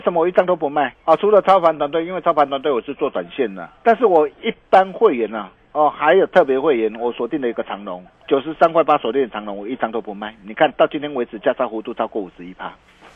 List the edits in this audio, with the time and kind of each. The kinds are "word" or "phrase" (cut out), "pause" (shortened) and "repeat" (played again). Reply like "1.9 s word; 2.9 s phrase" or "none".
0.9 s pause; 3.8 s pause; 5.6 s pause; 8.1 s pause